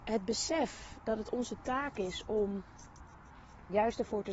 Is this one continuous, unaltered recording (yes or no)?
yes